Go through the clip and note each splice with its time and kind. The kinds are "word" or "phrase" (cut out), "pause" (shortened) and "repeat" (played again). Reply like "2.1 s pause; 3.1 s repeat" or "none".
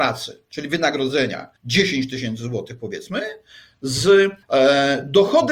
1.6 s pause; 4.4 s pause